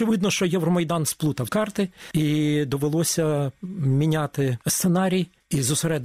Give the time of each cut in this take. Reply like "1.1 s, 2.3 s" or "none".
1.5 s

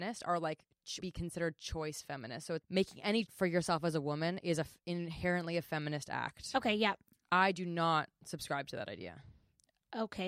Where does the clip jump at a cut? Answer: 1.0 s, 2.6 s, 3.3 s

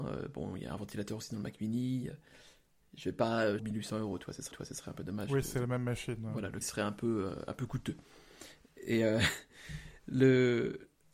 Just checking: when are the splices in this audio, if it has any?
3.6 s, 4.5 s, 6.6 s

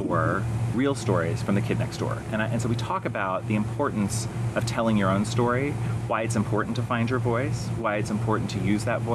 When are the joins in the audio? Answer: none

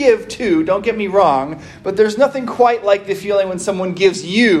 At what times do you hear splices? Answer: none

